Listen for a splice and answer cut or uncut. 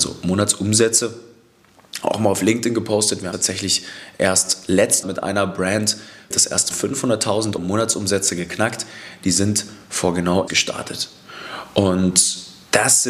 cut